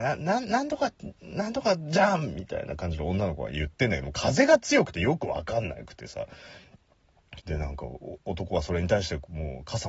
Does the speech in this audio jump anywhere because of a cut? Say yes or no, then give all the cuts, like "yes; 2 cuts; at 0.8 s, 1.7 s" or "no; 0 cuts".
yes; 1 cut; at 7.4 s